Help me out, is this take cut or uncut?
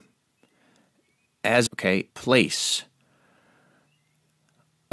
cut